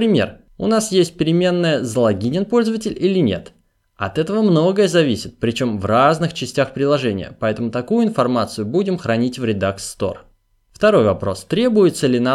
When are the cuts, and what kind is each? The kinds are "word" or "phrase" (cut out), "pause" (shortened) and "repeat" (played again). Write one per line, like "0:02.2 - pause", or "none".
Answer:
none